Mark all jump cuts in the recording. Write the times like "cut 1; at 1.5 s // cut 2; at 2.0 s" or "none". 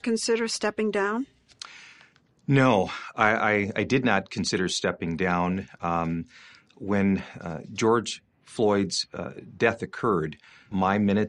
none